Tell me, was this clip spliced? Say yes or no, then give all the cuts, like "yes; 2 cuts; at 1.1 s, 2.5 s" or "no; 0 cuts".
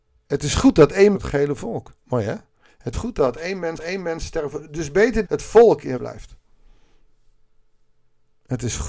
yes; 6 cuts; at 1.1 s, 2.0 s, 2.9 s, 3.8 s, 5.2 s, 6.0 s